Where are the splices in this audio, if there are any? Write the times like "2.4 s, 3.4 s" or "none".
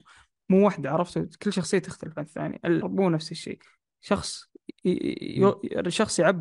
2.8 s